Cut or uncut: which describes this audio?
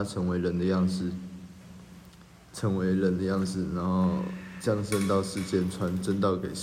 uncut